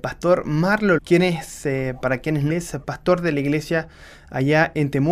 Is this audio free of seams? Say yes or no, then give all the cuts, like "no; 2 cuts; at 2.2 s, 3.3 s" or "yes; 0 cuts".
no; 3 cuts; at 1.0 s, 2.0 s, 2.5 s